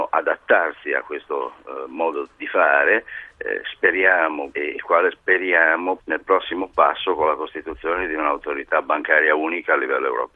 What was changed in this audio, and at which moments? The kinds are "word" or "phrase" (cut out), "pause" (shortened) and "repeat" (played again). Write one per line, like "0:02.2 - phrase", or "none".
0:04.5 - word
0:06.0 - word